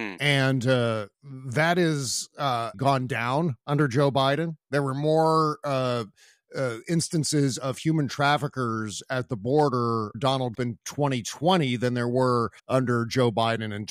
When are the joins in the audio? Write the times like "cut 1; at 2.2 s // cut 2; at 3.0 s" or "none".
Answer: cut 1; at 1.1 s // cut 2; at 2.7 s // cut 3; at 10.1 s // cut 4; at 10.5 s // cut 5; at 12.6 s